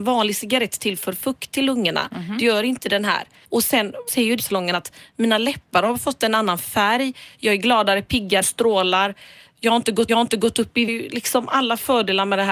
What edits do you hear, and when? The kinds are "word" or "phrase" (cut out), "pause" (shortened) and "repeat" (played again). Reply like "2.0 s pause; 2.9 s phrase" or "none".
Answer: 3.4 s pause; 4.1 s word; 4.4 s phrase; 8.4 s word; 10.1 s repeat; 10.9 s phrase